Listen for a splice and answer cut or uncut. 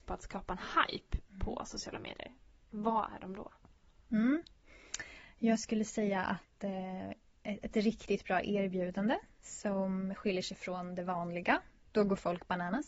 uncut